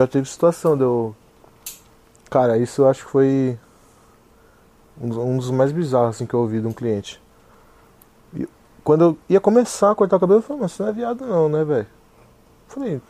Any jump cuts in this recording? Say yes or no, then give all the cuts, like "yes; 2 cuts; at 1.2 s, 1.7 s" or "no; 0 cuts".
no; 0 cuts